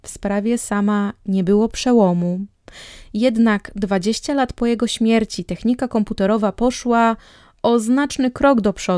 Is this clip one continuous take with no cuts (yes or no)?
yes